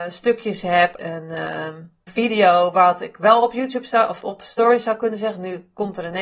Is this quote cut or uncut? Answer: cut